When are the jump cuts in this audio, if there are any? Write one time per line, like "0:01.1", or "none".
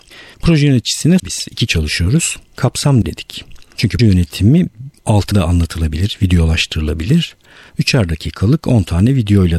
0:01.2
0:01.7
0:03.0
0:04.0
0:05.3